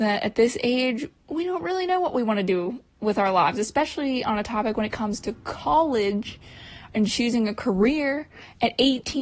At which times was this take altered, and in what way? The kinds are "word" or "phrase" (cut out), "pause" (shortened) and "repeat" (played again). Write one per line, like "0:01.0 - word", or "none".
0:01.2 - pause